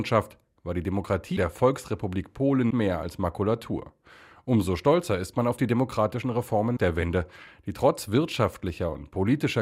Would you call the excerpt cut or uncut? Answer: cut